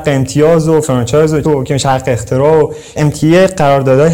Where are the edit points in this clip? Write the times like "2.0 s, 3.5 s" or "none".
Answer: 1.4 s, 3.0 s